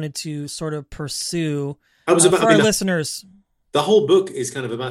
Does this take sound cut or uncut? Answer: uncut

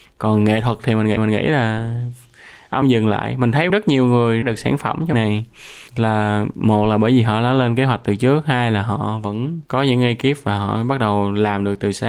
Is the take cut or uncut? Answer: cut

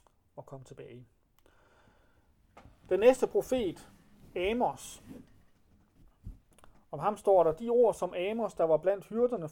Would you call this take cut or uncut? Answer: uncut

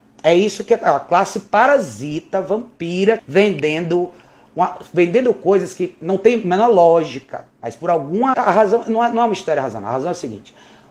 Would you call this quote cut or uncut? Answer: cut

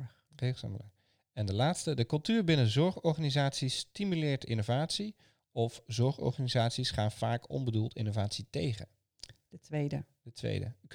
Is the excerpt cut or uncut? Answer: uncut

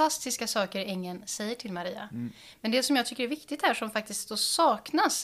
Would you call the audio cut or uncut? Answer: uncut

